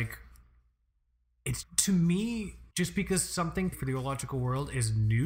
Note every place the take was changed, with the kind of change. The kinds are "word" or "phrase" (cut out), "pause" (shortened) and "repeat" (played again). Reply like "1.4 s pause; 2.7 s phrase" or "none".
1.6 s word; 2.7 s pause; 3.7 s word